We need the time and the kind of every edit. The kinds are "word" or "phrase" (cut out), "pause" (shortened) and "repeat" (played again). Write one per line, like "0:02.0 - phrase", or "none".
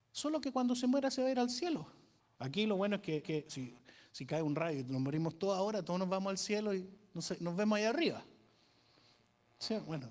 0:02.2 - pause
0:03.2 - repeat